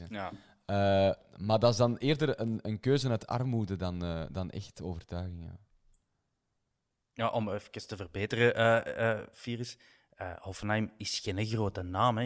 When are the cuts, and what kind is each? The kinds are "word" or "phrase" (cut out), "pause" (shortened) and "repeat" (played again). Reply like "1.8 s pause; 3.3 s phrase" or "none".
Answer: none